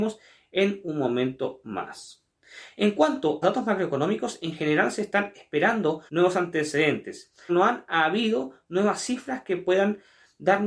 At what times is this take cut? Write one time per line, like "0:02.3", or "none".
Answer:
0:03.4
0:06.1
0:07.5